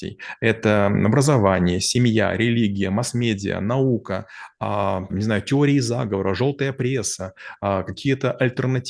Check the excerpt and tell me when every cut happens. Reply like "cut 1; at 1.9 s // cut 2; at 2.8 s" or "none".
cut 1; at 5.1 s